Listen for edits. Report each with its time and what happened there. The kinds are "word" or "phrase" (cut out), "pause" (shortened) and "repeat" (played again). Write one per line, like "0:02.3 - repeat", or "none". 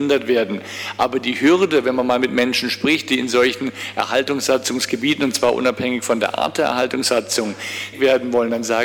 0:07.9 - word